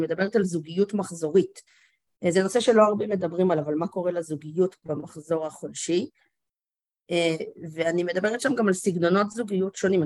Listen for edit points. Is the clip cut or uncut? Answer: uncut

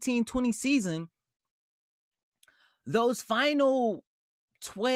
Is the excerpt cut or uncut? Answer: uncut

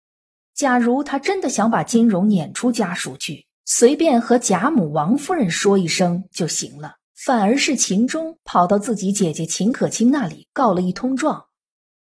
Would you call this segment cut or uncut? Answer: cut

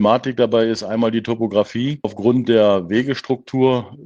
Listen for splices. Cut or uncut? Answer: uncut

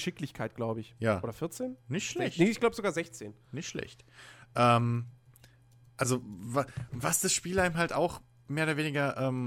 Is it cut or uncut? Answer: uncut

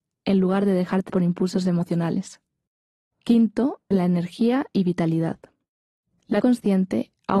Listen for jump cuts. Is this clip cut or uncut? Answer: cut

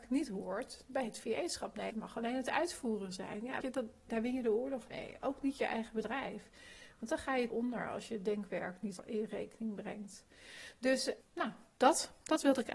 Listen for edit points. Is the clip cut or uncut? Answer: cut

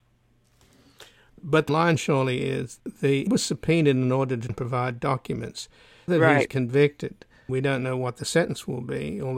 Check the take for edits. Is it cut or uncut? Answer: cut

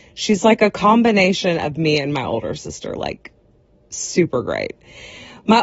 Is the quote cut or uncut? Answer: uncut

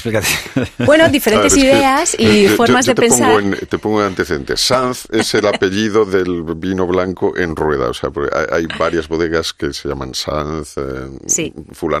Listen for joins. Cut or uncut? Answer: uncut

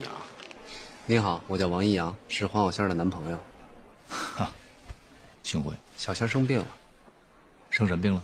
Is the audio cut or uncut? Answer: cut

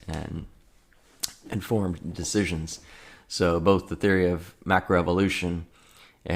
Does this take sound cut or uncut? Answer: uncut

